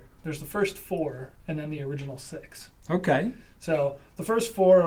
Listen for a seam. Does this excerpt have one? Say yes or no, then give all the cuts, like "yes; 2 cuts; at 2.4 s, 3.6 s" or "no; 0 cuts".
no; 0 cuts